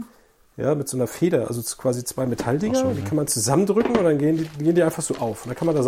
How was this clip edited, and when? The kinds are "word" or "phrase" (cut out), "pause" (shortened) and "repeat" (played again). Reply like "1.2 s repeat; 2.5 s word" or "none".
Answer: none